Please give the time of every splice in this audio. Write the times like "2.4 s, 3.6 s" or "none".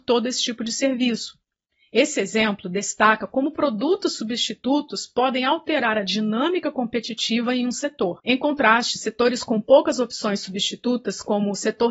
none